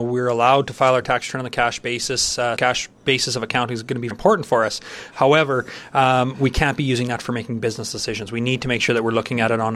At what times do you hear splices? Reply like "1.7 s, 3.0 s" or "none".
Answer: 2.6 s, 4.1 s